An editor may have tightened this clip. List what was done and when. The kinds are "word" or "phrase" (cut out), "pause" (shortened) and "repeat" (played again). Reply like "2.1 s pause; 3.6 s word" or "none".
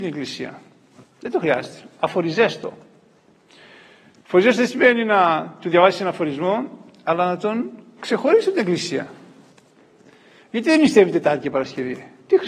none